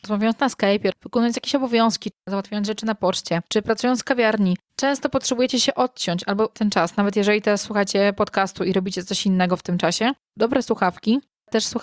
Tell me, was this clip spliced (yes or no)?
yes